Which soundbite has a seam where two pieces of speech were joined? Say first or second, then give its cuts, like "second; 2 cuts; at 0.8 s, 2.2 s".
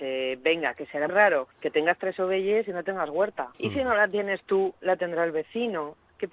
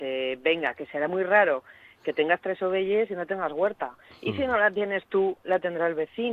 first; 3 cuts; at 1.1 s, 1.5 s, 3.5 s